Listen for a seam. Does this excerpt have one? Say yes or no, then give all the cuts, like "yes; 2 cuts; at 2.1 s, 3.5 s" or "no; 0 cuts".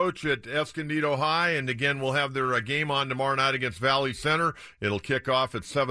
no; 0 cuts